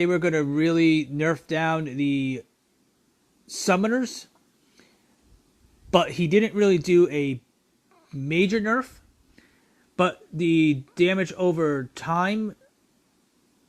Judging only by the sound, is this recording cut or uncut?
uncut